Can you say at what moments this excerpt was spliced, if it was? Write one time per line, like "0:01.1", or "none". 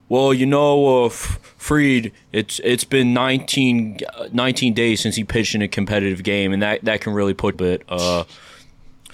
0:07.5